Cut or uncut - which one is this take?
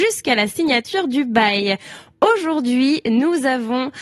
uncut